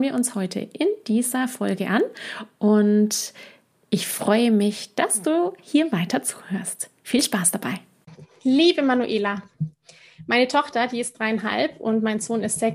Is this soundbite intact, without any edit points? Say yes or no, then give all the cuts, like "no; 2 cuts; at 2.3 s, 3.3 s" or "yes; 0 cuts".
yes; 0 cuts